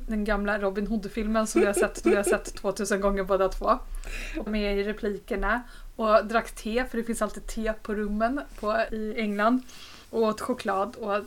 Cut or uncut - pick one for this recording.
cut